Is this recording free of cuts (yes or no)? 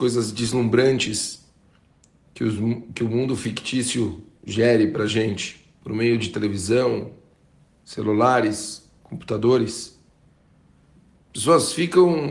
yes